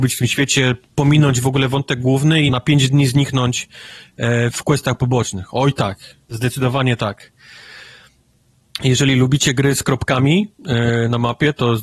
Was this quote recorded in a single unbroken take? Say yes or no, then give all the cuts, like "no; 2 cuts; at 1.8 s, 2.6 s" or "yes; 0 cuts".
no; 2 cuts; at 2.5 s, 6.2 s